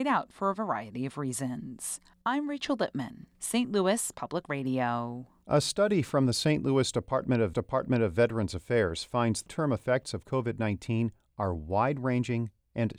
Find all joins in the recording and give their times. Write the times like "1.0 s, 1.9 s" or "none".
2.1 s, 3.3 s, 7.5 s, 9.5 s